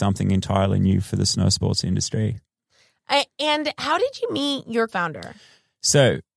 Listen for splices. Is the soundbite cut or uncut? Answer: cut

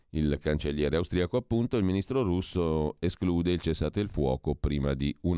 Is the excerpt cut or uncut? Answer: uncut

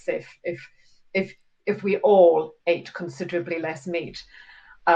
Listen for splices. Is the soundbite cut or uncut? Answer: uncut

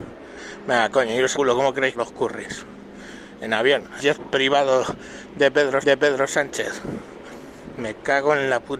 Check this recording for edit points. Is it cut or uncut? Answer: cut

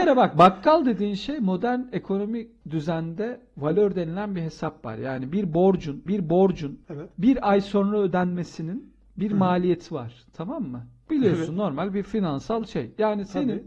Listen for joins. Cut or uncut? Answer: cut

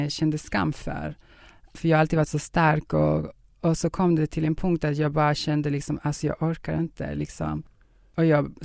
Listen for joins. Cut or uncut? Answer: uncut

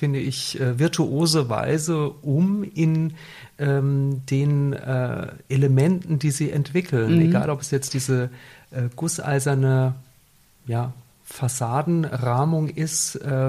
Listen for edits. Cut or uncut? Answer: uncut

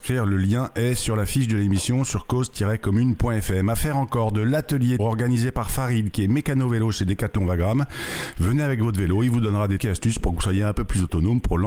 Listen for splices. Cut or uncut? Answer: cut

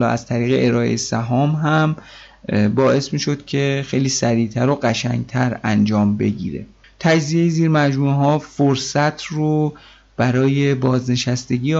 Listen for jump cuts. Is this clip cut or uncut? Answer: cut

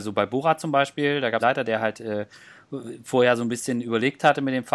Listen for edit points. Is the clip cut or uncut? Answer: cut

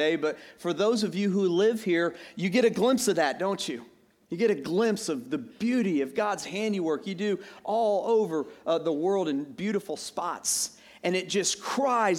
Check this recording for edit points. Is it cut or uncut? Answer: uncut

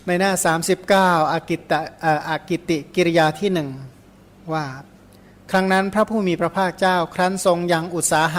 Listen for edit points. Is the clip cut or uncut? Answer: uncut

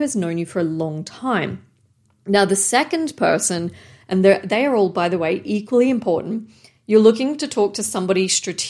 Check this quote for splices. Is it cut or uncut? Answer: uncut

